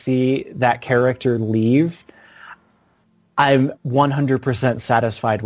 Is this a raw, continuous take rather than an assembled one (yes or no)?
no